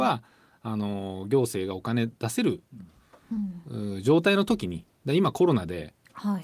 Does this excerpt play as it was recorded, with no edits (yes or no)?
no